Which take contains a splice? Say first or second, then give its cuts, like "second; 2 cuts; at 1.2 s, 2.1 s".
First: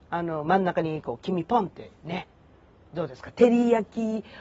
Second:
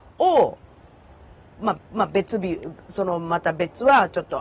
second; 1 cut; at 1.8 s